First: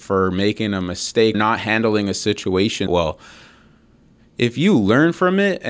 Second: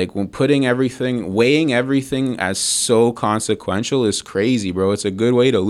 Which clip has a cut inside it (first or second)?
first